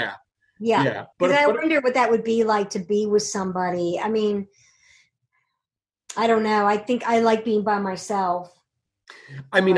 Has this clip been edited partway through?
yes; 1 cut; at 1.1 s

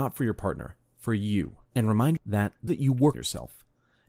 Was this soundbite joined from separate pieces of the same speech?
yes; 4 cuts; at 1.7 s, 2.2 s, 2.7 s, 3.1 s

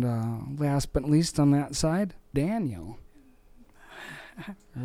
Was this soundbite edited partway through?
yes; 2 cuts; at 1.0 s, 2.3 s

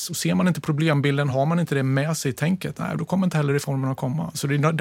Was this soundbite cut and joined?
no; 0 cuts

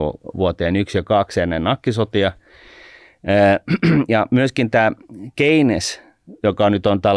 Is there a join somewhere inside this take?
no; 0 cuts

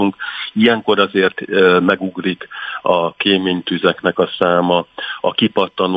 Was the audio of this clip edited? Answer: no; 0 cuts

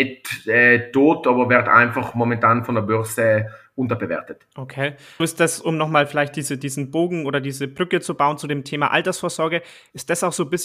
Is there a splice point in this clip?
yes; 1 cut; at 5.2 s

